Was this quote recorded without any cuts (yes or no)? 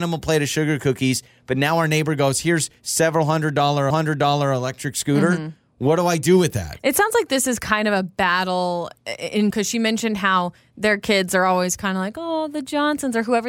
no